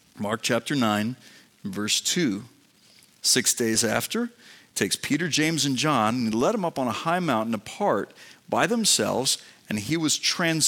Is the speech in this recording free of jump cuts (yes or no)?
yes